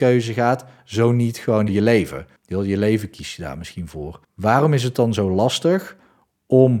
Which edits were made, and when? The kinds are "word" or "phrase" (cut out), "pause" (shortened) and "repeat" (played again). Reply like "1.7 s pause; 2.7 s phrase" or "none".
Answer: 1.7 s word; 2.4 s pause; 4.2 s pause